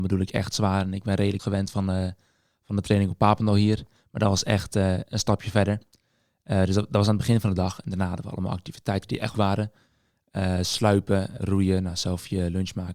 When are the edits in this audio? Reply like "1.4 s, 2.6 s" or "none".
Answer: 1.4 s, 9.3 s, 11.4 s